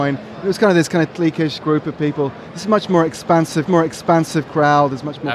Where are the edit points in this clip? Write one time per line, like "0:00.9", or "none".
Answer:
0:01.6
0:03.7